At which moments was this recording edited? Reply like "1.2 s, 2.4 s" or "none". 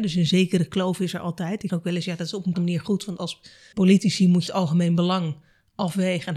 1.7 s, 2.5 s, 3.2 s, 3.7 s, 4.5 s